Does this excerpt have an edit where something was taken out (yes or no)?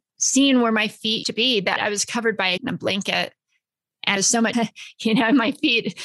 yes